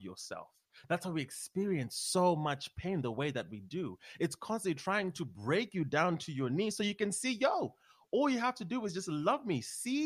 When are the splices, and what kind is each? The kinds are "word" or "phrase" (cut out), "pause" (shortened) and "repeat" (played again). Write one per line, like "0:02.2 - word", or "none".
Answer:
none